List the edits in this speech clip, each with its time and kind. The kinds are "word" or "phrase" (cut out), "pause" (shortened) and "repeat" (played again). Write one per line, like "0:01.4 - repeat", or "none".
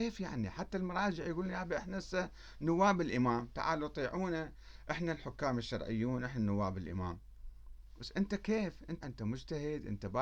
0:09.0 - word